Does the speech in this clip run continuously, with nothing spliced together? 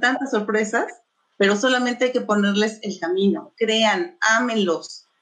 yes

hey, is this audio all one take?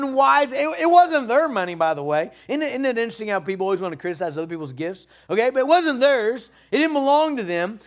yes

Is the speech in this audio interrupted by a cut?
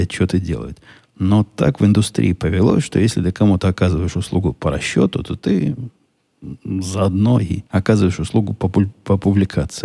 yes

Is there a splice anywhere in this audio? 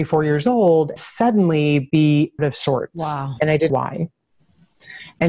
yes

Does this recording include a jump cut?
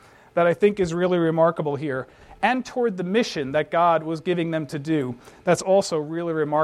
no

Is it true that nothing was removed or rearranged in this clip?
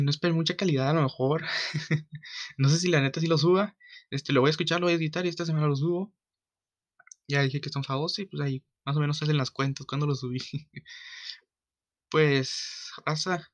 yes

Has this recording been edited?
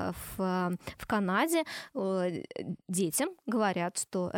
yes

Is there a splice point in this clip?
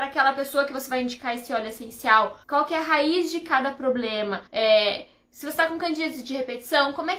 yes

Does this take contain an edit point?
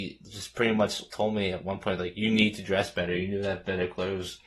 yes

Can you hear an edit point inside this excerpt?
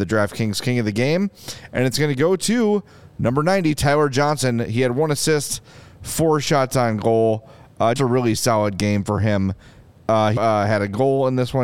yes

